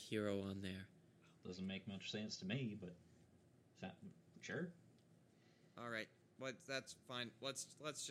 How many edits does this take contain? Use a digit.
0